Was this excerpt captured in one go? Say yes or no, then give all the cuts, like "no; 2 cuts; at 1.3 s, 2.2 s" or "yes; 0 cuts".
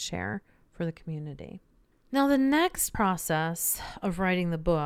yes; 0 cuts